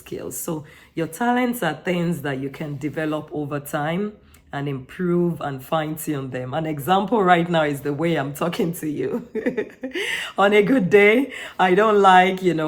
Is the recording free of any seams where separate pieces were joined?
yes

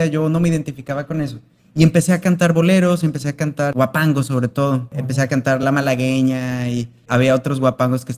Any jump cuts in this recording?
no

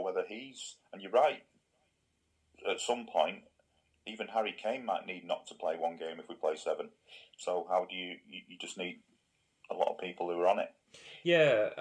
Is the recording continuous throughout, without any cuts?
yes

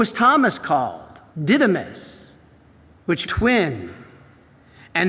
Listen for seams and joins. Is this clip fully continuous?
no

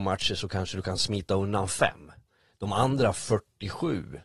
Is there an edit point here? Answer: no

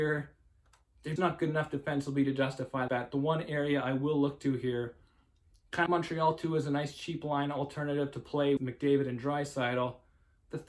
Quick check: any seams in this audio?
yes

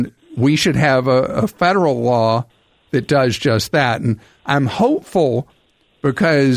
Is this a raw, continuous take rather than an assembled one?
yes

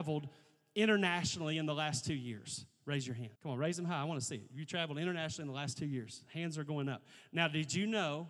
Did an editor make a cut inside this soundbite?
yes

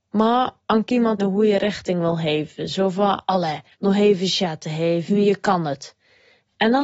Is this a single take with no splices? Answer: no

